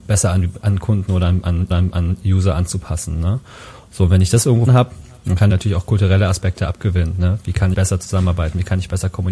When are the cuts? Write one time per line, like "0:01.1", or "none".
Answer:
0:01.7
0:04.7
0:05.5
0:07.7

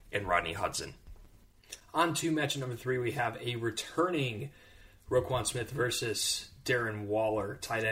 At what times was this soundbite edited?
none

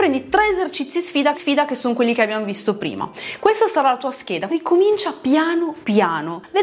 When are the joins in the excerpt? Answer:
0:01.3
0:04.5

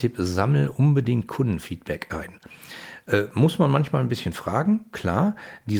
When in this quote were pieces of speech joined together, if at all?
none

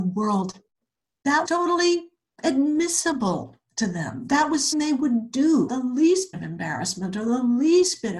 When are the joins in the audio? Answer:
0:01.5
0:04.7
0:05.7
0:06.3

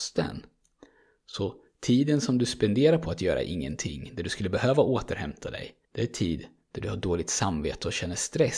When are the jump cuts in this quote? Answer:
0:05.8

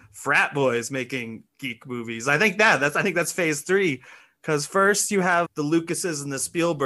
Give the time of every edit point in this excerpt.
0:01.5
0:05.4

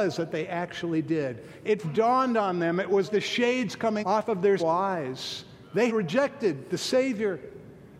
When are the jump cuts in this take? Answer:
0:01.8
0:03.1
0:04.0
0:04.6
0:05.9

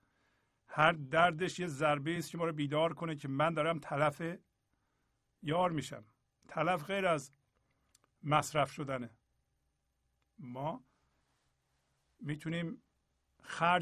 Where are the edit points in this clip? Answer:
none

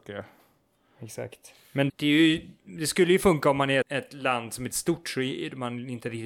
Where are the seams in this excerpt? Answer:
0:01.9
0:03.8
0:04.7

